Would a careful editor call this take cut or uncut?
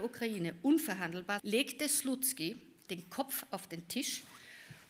cut